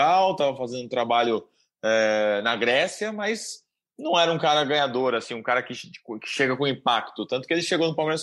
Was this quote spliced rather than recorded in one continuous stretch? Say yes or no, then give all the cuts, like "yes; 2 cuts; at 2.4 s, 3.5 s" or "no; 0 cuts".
no; 0 cuts